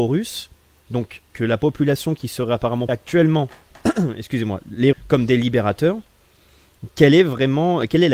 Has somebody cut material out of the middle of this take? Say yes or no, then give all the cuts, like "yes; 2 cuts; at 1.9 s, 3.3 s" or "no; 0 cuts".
yes; 3 cuts; at 1.3 s, 2.9 s, 4.9 s